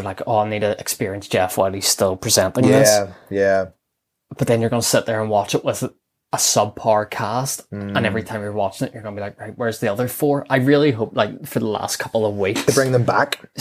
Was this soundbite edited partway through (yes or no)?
no